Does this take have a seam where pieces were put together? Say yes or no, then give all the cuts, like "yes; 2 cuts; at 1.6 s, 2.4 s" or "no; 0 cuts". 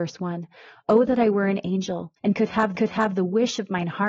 yes; 2 cuts; at 2.2 s, 2.8 s